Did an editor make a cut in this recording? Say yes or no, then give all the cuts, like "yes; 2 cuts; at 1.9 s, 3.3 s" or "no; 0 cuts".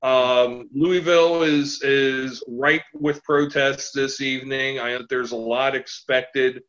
yes; 1 cut; at 5.0 s